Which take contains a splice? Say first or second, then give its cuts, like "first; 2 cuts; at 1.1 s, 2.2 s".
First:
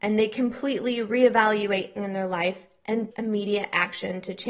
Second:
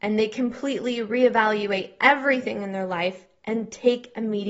first; 2 cuts; at 2.0 s, 3.1 s